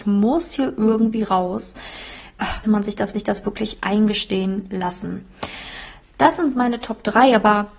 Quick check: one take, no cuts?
no; 2 cuts; at 2.6 s, 3.1 s

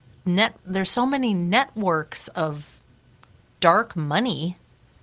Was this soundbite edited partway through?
no; 0 cuts

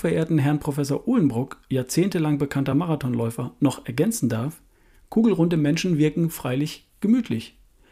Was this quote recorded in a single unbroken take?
yes; 0 cuts

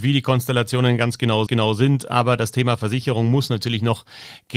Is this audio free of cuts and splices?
no; 1 cut; at 1.5 s

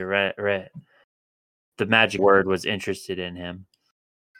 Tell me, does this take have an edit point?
yes; 1 cut; at 2.2 s

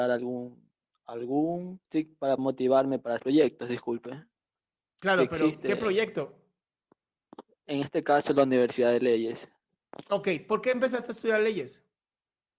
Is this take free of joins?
no; 3 cuts; at 1.8 s, 2.4 s, 3.2 s

